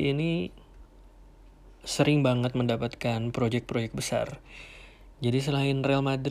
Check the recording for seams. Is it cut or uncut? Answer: uncut